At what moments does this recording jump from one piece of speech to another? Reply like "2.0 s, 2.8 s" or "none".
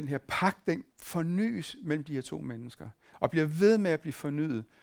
0.9 s